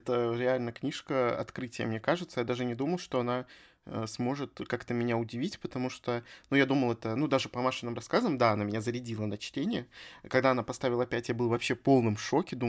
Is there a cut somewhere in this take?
no; 0 cuts

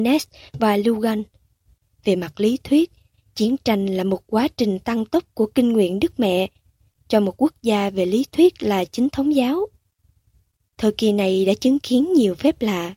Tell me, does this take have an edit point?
no; 0 cuts

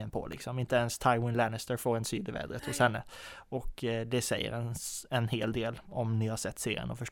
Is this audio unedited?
yes; 0 cuts

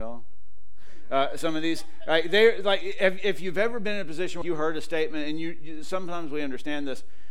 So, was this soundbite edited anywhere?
yes; 1 cut; at 4.4 s

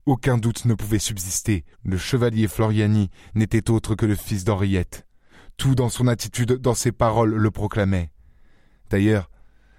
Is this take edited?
yes; 1 cut; at 1.7 s

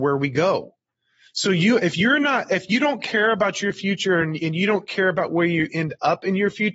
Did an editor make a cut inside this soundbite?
no; 0 cuts

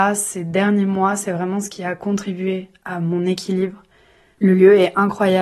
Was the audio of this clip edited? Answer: no; 0 cuts

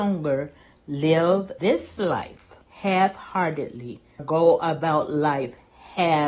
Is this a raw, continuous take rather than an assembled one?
no; 3 cuts; at 1.6 s, 2.6 s, 4.2 s

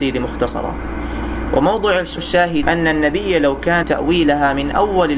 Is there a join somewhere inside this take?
yes; 3 cuts; at 2.2 s, 2.6 s, 3.8 s

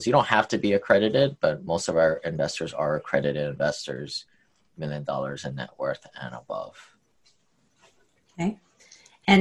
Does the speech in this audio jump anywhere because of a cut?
no; 0 cuts

